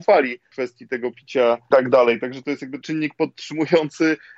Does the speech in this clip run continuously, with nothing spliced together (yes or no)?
no